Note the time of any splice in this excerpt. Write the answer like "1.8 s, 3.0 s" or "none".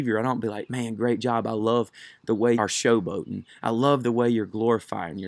2.5 s